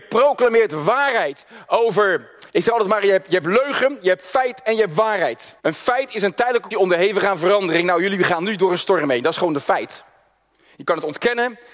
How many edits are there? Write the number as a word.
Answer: three